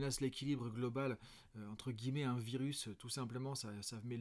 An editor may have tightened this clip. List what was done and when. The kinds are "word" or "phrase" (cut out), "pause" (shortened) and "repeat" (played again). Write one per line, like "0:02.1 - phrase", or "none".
none